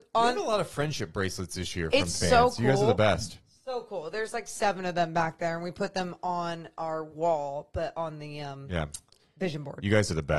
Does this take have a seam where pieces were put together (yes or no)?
no